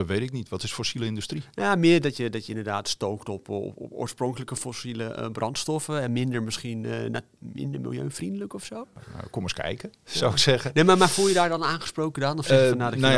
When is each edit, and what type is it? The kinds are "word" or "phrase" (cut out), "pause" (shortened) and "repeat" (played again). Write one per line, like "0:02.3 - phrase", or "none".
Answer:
none